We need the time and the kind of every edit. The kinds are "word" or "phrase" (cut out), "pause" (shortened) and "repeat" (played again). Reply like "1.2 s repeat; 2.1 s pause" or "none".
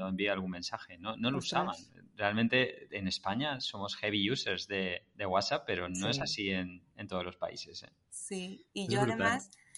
none